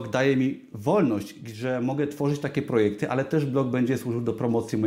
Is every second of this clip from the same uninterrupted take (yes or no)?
yes